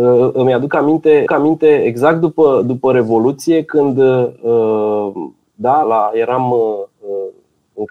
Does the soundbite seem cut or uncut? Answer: cut